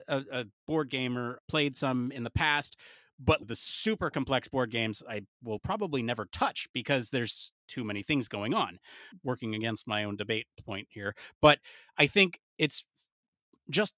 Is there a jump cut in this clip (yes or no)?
no